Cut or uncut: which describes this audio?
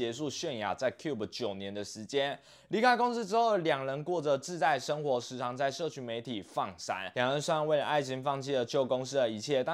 uncut